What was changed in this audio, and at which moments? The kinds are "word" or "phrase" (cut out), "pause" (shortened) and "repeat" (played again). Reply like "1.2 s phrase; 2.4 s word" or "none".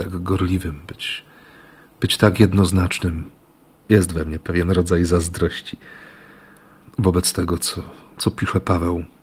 none